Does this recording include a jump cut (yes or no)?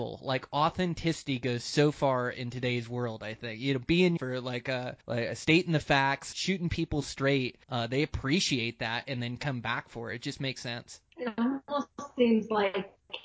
yes